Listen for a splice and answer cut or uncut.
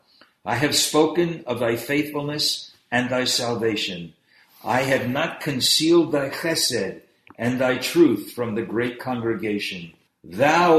uncut